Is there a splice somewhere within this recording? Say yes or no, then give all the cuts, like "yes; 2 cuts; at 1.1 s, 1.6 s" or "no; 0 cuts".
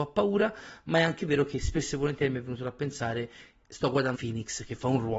yes; 1 cut; at 4.1 s